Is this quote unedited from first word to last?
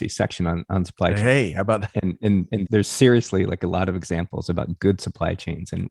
no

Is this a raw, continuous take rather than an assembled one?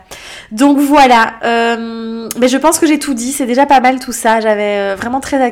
yes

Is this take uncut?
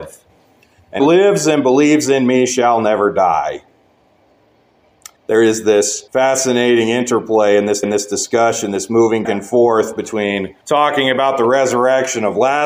no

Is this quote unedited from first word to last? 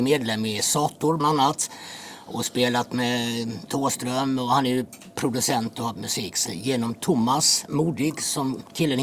no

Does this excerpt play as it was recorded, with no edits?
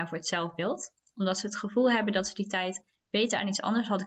yes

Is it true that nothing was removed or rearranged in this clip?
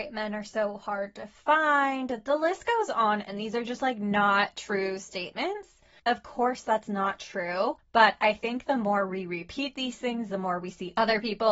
yes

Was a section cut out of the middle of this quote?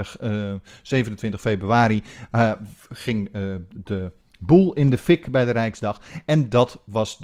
no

